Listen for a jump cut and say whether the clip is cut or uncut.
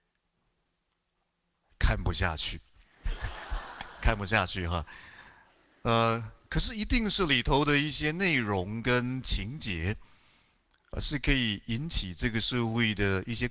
uncut